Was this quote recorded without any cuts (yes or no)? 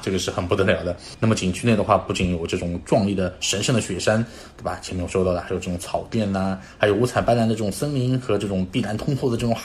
yes